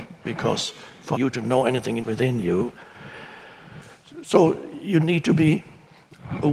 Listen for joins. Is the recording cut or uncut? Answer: cut